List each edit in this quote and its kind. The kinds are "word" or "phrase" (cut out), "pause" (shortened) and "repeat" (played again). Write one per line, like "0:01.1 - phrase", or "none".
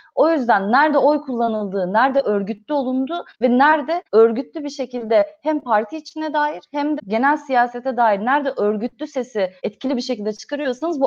0:03.3 - pause
0:04.0 - pause
0:07.0 - word
0:09.6 - pause